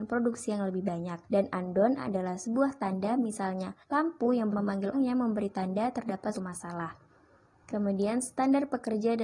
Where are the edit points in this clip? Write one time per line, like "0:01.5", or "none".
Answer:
0:01.2
0:03.8
0:04.5
0:04.9
0:06.3